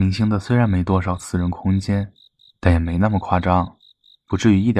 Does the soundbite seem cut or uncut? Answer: uncut